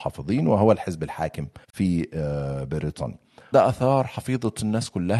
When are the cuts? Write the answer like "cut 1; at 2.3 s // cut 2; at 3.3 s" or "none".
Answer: cut 1; at 1.6 s // cut 2; at 3.5 s